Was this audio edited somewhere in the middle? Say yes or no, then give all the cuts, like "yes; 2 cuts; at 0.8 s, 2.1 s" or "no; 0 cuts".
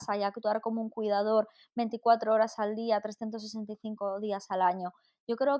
no; 0 cuts